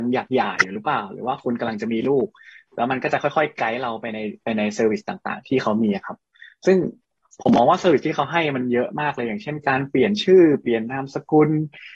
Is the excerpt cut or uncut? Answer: uncut